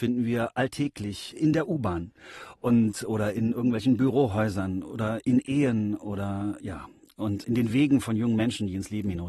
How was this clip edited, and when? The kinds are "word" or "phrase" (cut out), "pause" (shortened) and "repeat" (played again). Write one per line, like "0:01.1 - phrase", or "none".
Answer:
0:01.3 - word
0:07.4 - word